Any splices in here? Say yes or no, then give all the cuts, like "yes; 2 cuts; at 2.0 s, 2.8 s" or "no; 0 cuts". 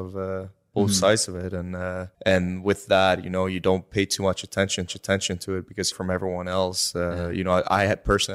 yes; 3 cuts; at 2.1 s, 4.9 s, 5.9 s